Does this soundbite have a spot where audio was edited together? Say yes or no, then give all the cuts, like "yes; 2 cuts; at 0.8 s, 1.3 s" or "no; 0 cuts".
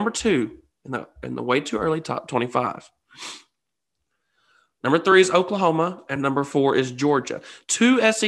no; 0 cuts